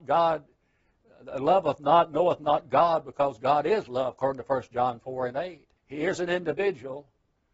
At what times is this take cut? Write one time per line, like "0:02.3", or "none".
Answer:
0:05.8